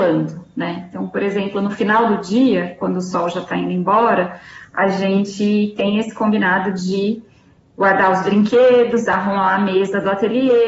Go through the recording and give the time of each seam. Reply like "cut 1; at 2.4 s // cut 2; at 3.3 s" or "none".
none